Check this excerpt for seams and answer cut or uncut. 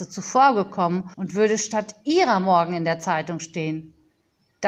cut